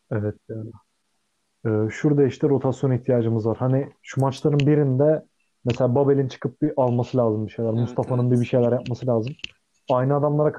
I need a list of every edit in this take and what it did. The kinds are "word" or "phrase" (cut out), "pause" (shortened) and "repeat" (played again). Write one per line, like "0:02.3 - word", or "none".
none